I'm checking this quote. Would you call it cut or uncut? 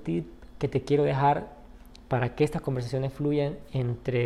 uncut